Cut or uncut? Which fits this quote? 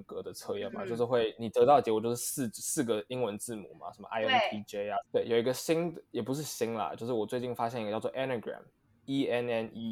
cut